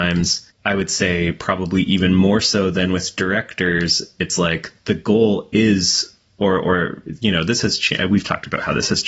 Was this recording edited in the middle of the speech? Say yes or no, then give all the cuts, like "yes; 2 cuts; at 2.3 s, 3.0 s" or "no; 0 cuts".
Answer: no; 0 cuts